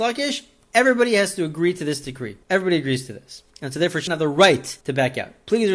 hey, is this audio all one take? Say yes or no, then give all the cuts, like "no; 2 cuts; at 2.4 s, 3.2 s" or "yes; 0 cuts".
no; 4 cuts; at 2.4 s, 3.5 s, 4.1 s, 4.8 s